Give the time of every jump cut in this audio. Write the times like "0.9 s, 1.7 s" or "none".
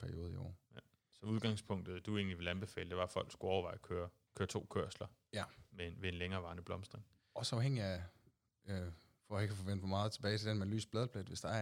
none